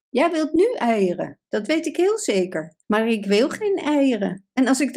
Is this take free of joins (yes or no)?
no